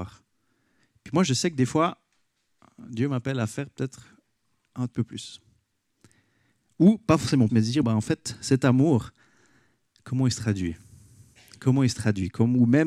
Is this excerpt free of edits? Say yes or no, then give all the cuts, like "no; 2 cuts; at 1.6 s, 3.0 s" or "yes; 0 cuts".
no; 3 cuts; at 4.9 s, 7.5 s, 7.8 s